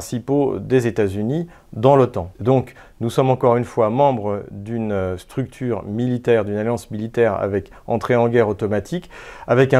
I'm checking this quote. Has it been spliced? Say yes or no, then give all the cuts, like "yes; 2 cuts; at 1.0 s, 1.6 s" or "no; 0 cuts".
yes; 1 cut; at 2.4 s